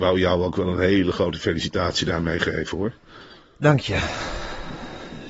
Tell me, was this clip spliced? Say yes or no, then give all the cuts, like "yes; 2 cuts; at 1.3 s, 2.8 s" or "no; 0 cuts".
no; 0 cuts